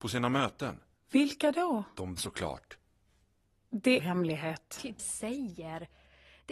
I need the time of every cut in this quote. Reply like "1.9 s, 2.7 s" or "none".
2.2 s, 4.0 s, 5.0 s